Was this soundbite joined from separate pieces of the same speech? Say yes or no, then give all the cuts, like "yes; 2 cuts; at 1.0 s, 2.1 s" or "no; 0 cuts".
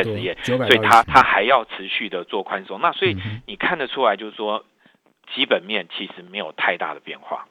yes; 2 cuts; at 1.0 s, 5.2 s